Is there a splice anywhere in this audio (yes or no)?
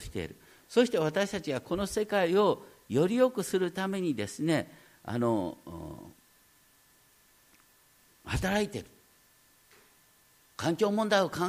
no